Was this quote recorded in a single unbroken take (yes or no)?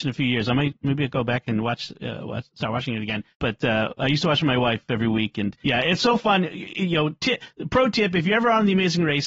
no